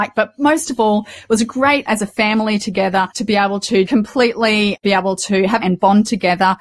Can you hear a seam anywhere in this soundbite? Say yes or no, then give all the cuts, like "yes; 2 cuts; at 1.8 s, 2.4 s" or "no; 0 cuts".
yes; 4 cuts; at 1.9 s, 3.1 s, 3.9 s, 5.6 s